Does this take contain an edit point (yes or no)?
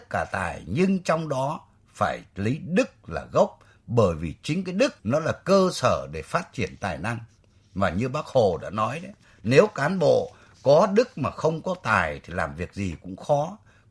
yes